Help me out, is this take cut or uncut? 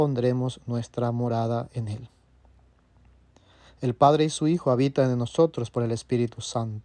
uncut